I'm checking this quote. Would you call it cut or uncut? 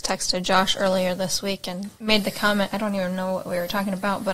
cut